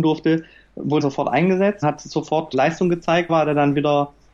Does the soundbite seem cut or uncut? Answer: cut